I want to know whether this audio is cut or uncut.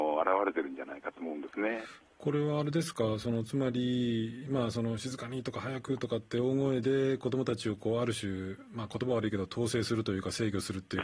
uncut